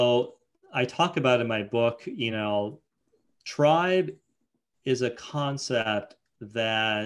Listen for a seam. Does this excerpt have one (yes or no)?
no